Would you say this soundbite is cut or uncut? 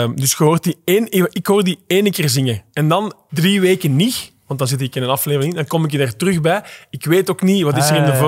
uncut